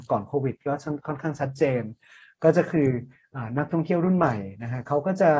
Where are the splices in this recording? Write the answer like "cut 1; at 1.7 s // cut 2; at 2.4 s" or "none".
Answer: none